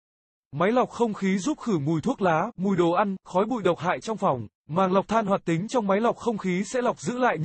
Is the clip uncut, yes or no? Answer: no